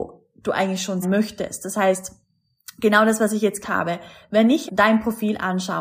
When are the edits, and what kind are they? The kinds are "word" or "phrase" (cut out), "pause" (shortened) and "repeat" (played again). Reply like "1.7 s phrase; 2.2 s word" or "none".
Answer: 1.0 s word; 3.6 s word; 4.7 s word